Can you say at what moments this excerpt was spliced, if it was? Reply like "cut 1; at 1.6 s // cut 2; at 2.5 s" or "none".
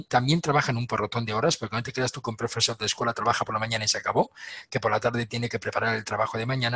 none